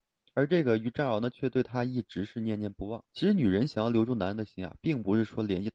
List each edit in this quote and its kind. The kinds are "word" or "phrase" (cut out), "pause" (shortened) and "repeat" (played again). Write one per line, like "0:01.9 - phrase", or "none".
0:03.1 - pause